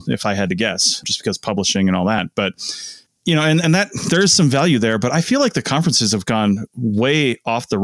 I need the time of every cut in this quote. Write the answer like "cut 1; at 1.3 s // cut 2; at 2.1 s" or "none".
cut 1; at 3.1 s

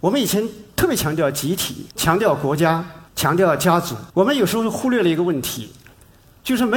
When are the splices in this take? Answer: cut 1; at 1.9 s // cut 2; at 3.1 s // cut 3; at 4.1 s

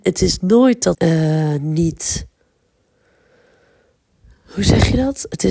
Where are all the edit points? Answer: cut 1; at 0.9 s

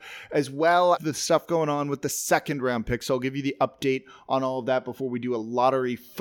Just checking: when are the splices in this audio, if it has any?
cut 1; at 1.0 s

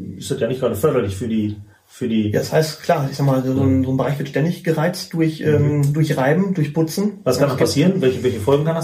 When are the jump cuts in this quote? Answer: cut 1; at 3.5 s

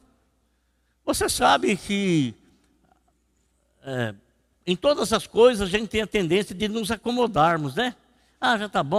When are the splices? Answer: none

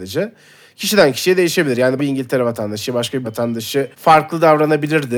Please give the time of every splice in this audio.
cut 1; at 2.0 s // cut 2; at 3.2 s // cut 3; at 3.9 s

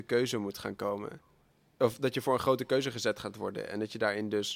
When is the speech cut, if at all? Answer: cut 1; at 1.5 s

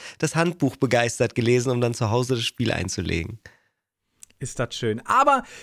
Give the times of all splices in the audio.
none

